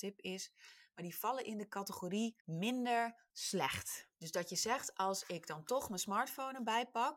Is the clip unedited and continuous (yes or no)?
no